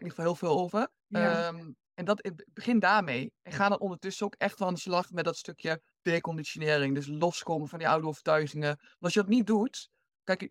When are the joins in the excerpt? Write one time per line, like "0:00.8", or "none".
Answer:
0:01.0
0:01.8
0:05.9